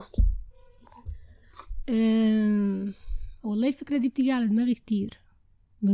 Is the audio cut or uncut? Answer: uncut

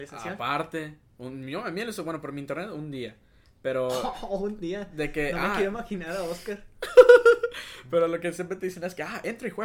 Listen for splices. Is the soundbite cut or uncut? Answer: uncut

